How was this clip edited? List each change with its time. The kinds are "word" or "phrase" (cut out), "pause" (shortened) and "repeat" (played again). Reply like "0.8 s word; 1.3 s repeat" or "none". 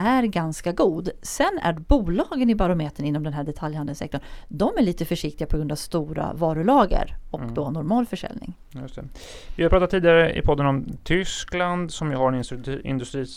none

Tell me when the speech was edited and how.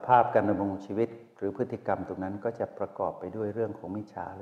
none

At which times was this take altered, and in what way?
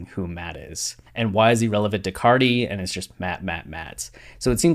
1.1 s pause

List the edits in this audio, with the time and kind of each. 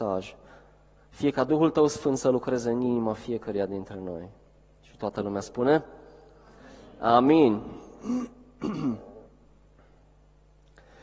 none

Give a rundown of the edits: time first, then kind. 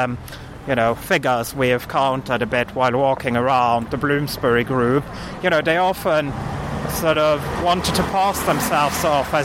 none

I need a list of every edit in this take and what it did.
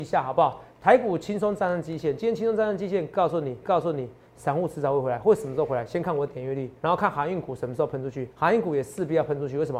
3.6 s repeat; 6.8 s pause; 8.3 s pause

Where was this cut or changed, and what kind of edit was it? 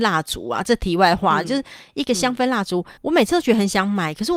3.0 s pause

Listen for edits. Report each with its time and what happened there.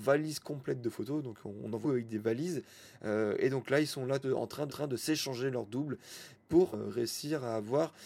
1.8 s word; 4.2 s word; 4.7 s repeat; 6.7 s phrase

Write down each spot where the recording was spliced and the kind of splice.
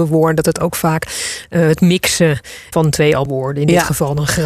2.7 s word; 3.3 s word

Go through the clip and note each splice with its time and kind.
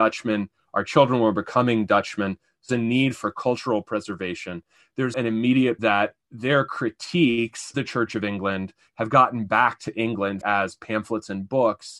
2.7 s word; 5.1 s word; 5.8 s word; 7.7 s word; 10.4 s word

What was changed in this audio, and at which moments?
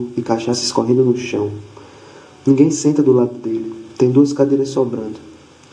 none

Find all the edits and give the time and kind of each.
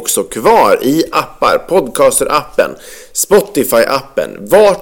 1.1 s word

